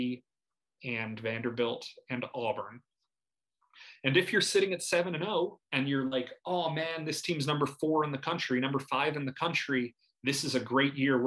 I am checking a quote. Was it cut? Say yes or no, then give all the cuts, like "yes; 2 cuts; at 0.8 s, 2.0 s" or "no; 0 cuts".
yes; 1 cut; at 5.6 s